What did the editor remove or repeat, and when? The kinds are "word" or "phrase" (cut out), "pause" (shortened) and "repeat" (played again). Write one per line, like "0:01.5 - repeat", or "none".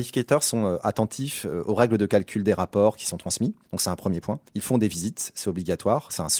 0:03.6 - pause
0:04.5 - pause